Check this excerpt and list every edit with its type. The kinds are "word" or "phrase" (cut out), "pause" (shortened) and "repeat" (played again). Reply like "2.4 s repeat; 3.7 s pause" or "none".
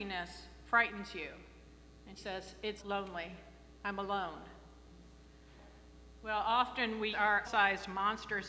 2.2 s word; 2.8 s word; 7.1 s word; 7.4 s word

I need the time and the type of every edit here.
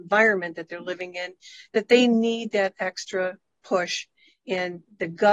none

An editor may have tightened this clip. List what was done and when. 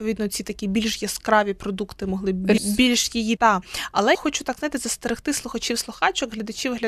2.6 s phrase; 3.4 s word; 4.1 s word

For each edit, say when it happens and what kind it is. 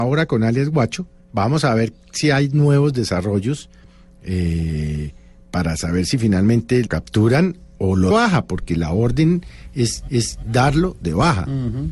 1.2 s pause; 6.9 s word; 8.1 s phrase; 10.1 s repeat

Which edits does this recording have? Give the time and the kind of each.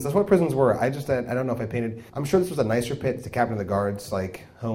2.1 s pause

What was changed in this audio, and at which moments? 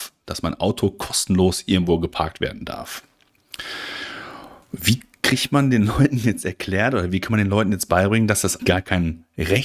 8.6 s word

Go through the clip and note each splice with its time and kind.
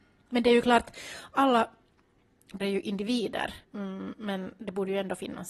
2.6 s word; 3.6 s pause

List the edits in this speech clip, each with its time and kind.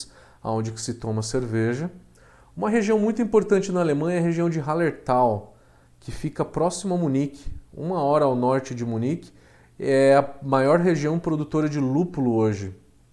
none

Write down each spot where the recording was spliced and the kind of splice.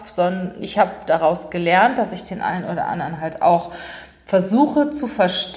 none

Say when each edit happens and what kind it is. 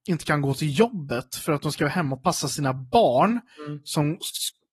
none

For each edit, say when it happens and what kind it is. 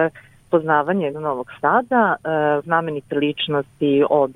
1.1 s word; 2.6 s word

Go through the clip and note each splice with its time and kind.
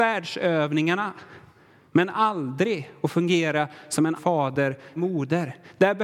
4.2 s word; 5.0 s word

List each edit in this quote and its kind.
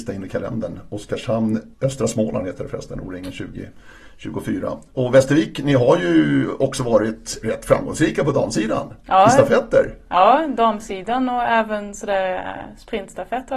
1.7 s pause

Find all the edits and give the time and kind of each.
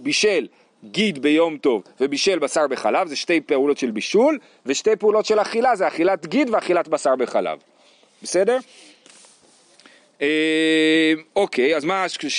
none

